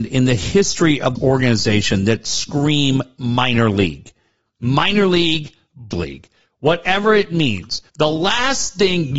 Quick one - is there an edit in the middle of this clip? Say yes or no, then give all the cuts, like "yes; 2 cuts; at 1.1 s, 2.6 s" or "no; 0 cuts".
yes; 3 cuts; at 1.1 s, 5.9 s, 7.9 s